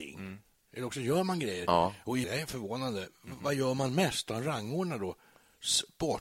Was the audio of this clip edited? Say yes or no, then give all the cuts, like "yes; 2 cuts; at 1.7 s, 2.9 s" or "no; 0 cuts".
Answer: yes; 1 cut; at 2.2 s